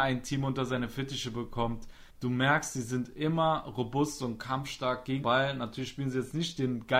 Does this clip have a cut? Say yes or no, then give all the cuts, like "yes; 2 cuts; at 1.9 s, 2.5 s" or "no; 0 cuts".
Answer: yes; 2 cuts; at 2.1 s, 5.2 s